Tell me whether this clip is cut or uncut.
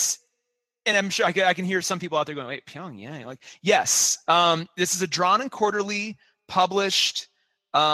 uncut